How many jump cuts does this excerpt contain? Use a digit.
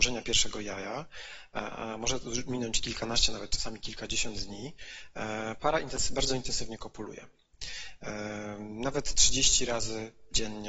0